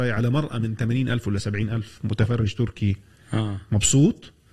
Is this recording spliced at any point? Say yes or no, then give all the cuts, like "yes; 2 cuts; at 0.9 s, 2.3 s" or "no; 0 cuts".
no; 0 cuts